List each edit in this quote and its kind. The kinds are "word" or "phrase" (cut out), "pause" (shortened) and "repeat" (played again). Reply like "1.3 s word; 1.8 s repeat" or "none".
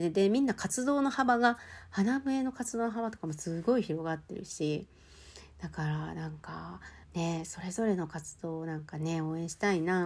7.0 s pause

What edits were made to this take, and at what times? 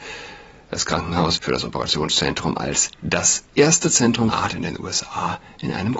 1.4 s word; 2.9 s pause; 4.3 s word

